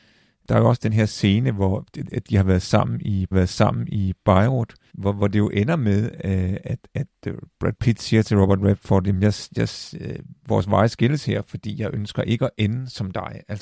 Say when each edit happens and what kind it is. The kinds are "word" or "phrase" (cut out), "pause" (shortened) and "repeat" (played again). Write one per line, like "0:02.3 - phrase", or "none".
0:03.3 - repeat
0:04.9 - pause